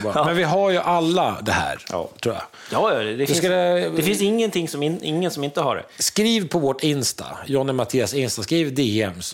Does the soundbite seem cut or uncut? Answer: uncut